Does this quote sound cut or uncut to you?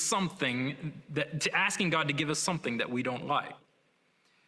uncut